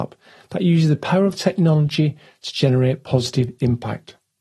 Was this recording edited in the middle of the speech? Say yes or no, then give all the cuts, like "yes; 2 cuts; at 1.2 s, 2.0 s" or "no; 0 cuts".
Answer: no; 0 cuts